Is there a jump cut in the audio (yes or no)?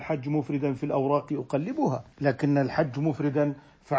yes